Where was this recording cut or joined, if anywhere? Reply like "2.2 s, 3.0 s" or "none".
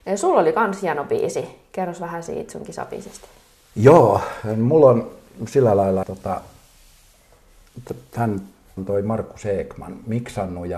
6.0 s, 8.8 s